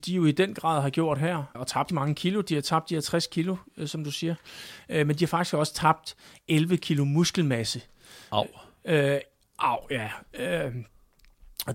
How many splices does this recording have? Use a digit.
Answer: 2